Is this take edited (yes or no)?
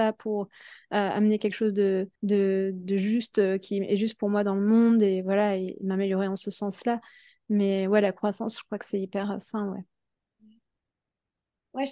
yes